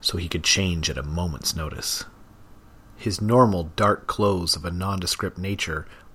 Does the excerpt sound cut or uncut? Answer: uncut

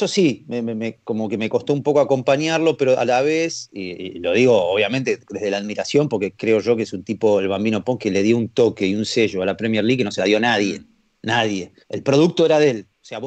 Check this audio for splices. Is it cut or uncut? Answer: cut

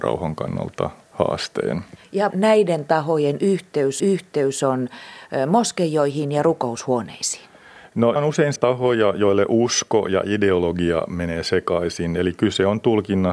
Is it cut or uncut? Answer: cut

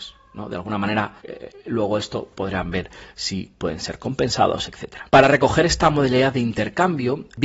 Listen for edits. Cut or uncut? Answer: cut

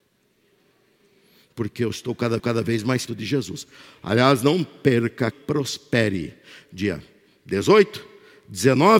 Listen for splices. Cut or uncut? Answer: cut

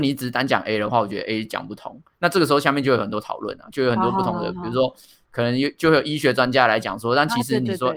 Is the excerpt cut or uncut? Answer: uncut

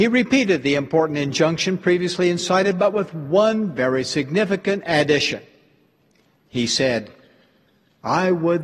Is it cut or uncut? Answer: uncut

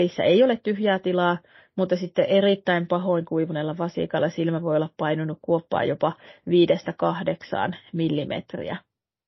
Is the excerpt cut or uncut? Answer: uncut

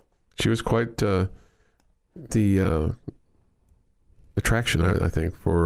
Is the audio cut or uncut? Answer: cut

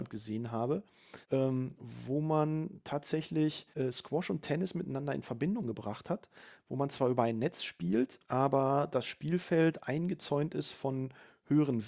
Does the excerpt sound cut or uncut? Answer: cut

